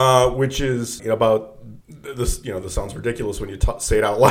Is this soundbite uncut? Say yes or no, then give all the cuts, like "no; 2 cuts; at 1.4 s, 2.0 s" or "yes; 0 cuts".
no; 2 cuts; at 1.0 s, 1.8 s